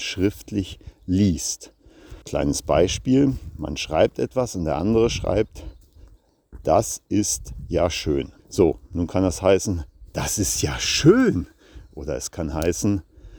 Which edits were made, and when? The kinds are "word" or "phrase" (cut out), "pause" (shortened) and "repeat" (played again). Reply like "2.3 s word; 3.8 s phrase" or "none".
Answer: 2.2 s pause; 8.4 s pause